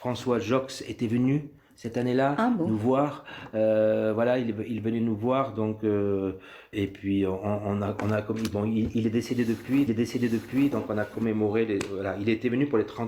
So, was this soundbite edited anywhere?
yes; 2 cuts; at 6.7 s, 9.9 s

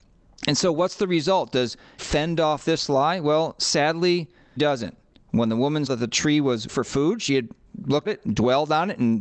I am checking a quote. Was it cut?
yes; 5 cuts; at 2.0 s, 4.6 s, 5.9 s, 6.7 s, 8.1 s

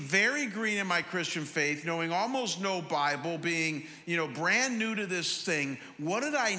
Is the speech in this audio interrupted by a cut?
no; 0 cuts

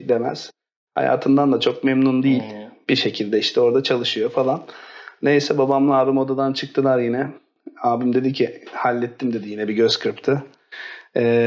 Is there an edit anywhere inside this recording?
no; 0 cuts

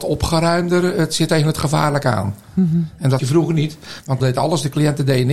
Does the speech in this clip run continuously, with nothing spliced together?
no; 3 cuts; at 1.3 s, 3.2 s, 4.2 s

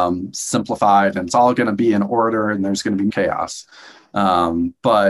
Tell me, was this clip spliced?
yes; 1 cut; at 3.1 s

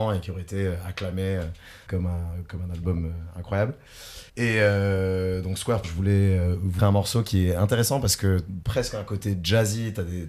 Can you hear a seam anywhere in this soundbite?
yes; 6 cuts; at 1.9 s, 2.5 s, 4.3 s, 5.8 s, 6.8 s, 8.6 s

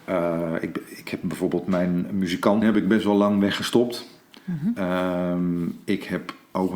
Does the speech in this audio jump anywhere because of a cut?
yes; 1 cut; at 2.6 s

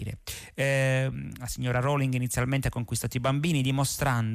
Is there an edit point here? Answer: no; 0 cuts

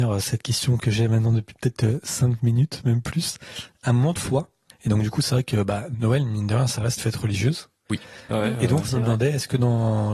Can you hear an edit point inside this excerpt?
yes; 3 cuts; at 4.2 s, 4.7 s, 7.0 s

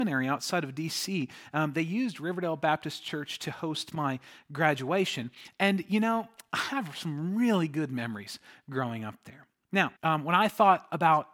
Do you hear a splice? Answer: yes; 1 cut; at 10.0 s

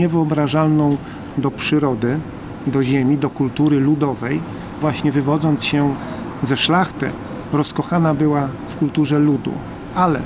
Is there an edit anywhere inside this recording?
yes; 1 cut; at 4.8 s

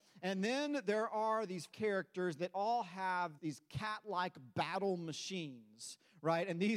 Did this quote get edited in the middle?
yes; 2 cuts; at 1.7 s, 3.4 s

